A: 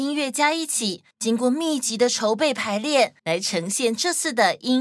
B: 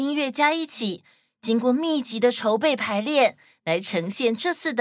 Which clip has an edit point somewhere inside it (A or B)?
A